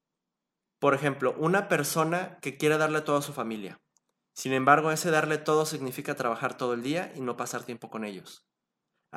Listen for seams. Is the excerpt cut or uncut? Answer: uncut